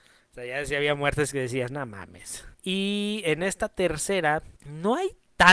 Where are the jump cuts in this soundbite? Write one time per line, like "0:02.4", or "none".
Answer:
0:02.5
0:04.6